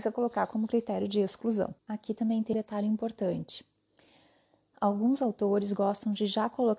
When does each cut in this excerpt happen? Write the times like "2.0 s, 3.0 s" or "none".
1.8 s, 2.5 s